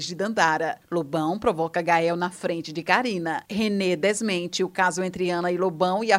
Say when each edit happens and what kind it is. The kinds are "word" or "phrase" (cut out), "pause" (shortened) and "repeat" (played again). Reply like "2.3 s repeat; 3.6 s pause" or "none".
3.4 s pause